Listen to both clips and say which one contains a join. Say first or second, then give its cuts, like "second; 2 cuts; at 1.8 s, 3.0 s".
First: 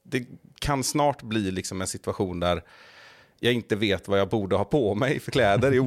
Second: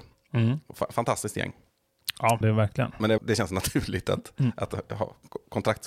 second; 2 cuts; at 2.4 s, 3.2 s